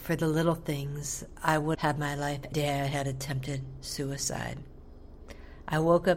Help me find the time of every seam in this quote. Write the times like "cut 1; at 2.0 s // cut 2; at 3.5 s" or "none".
cut 1; at 1.7 s // cut 2; at 2.5 s